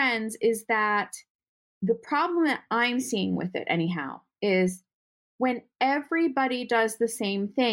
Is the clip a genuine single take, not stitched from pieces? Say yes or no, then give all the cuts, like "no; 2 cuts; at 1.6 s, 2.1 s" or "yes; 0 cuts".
yes; 0 cuts